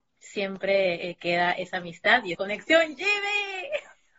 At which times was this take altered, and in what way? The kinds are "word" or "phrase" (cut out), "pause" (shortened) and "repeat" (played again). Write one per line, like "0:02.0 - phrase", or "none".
0:02.3 - word

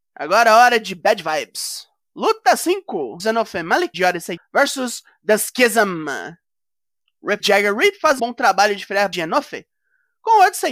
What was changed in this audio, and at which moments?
0:03.2 - word
0:03.9 - word
0:04.4 - word
0:07.4 - word
0:08.2 - word
0:09.1 - word

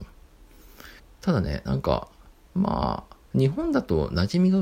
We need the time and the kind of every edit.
0:01.0 - pause

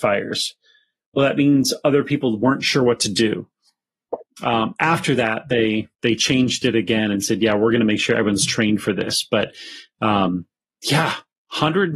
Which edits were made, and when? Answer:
0:05.9 - pause

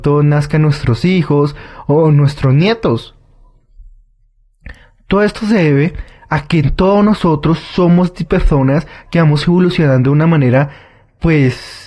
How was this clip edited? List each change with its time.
none

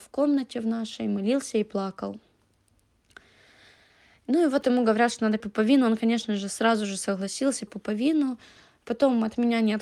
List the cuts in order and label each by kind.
0:05.4 - word
0:07.7 - word

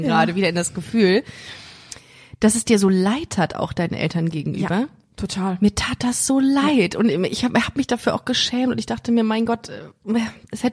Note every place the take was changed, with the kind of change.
none

